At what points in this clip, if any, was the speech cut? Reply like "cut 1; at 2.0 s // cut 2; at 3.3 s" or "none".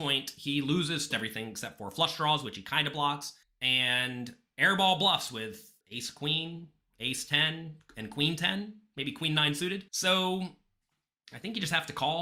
cut 1; at 1.1 s // cut 2; at 3.4 s // cut 3; at 5.8 s // cut 4; at 9.9 s